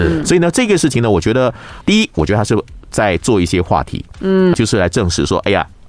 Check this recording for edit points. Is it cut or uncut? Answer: cut